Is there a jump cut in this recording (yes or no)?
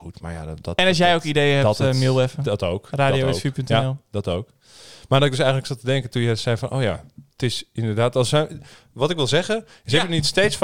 no